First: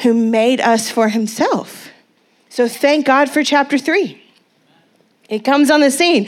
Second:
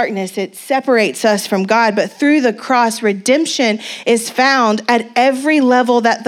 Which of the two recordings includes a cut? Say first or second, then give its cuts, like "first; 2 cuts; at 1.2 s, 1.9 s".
first; 1 cut; at 2.2 s